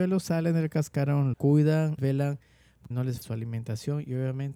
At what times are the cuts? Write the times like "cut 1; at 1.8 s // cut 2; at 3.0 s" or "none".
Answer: cut 1; at 1.3 s // cut 2; at 2.0 s // cut 3; at 2.9 s // cut 4; at 3.2 s